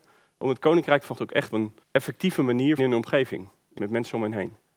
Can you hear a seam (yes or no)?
yes